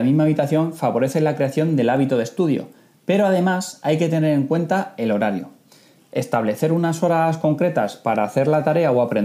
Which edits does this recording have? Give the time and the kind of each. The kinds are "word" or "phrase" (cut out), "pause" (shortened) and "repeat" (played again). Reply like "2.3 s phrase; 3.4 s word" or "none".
none